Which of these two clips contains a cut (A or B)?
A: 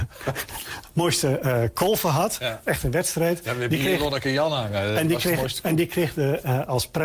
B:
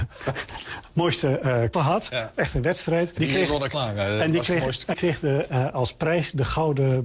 B